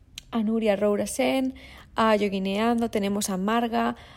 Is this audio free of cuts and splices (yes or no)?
yes